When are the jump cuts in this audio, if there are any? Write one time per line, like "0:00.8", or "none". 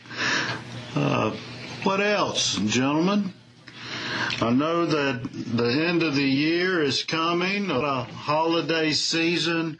0:07.8